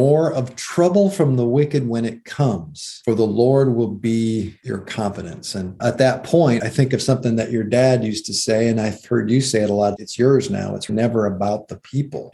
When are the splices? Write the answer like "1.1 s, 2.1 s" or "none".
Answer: 5.8 s, 10.0 s, 10.9 s